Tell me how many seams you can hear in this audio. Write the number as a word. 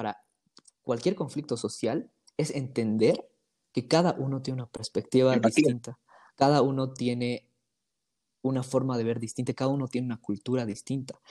zero